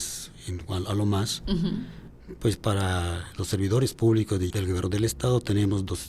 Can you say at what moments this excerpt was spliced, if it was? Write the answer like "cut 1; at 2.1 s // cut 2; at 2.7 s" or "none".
cut 1; at 3.3 s // cut 2; at 4.5 s